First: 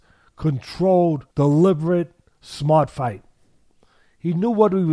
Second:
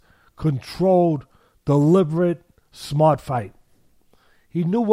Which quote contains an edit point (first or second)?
first